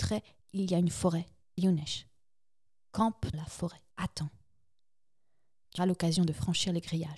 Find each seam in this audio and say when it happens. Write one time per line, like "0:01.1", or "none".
0:01.6
0:03.3
0:03.9
0:05.8